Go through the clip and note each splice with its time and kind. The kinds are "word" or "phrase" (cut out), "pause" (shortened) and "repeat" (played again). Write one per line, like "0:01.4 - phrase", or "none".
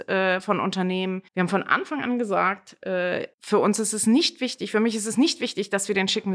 0:01.3 - pause
0:03.3 - pause